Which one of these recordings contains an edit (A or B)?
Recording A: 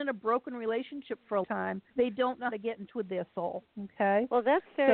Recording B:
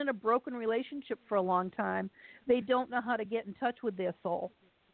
A